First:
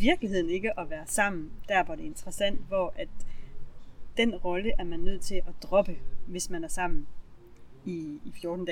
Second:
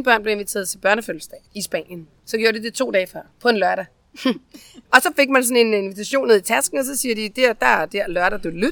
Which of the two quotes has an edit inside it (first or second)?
second